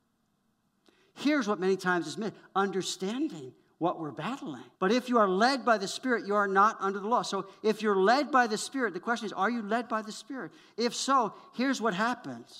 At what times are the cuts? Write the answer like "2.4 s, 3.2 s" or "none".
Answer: 4.8 s